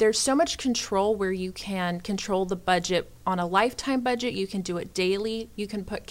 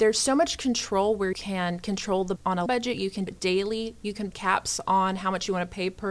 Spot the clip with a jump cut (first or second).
second